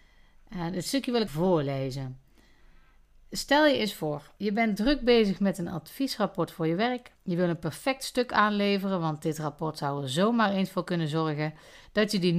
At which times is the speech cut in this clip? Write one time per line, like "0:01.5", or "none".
0:01.3
0:04.4
0:07.2